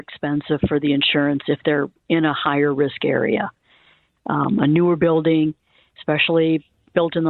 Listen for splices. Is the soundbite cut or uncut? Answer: uncut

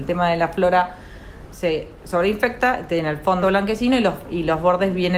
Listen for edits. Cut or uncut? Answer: cut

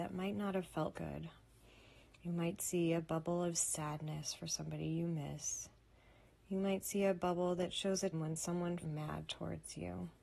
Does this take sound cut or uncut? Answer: cut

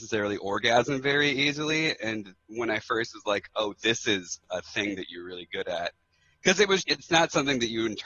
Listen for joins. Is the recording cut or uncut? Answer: cut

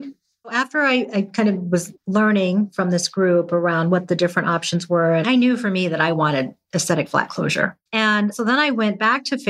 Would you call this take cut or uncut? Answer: cut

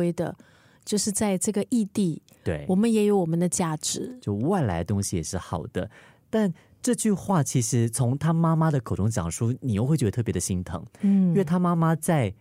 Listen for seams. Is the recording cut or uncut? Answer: uncut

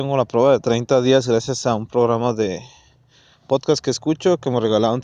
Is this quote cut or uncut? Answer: uncut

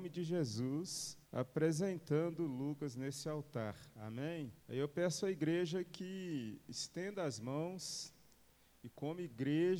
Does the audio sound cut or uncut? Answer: cut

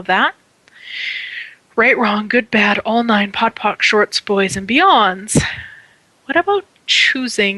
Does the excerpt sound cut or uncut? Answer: uncut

